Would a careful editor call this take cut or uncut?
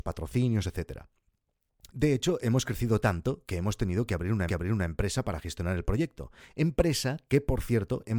cut